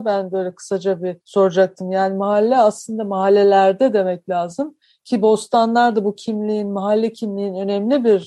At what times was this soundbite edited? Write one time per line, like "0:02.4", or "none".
0:01.2